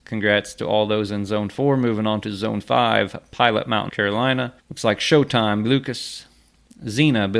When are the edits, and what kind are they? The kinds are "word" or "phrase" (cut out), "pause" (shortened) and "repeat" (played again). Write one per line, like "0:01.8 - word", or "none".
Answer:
0:03.9 - word
0:04.6 - pause
0:05.6 - word